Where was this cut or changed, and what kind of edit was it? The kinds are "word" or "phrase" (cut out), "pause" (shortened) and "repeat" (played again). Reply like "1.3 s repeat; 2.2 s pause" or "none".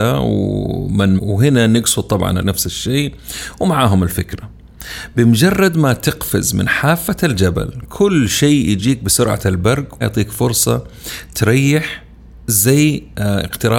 1.2 s word; 2.4 s phrase; 10.0 s word